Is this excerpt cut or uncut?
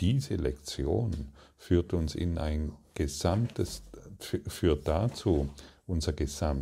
uncut